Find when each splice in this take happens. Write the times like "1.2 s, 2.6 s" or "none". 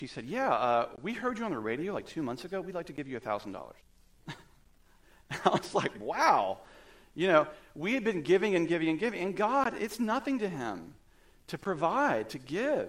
3.8 s